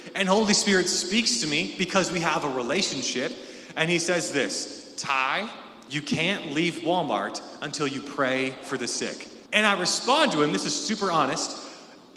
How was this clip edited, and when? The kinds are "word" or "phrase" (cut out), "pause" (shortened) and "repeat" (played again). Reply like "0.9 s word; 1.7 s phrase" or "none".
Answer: 9.5 s pause

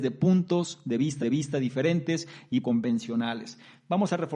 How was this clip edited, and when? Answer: 1.2 s repeat; 2.6 s word

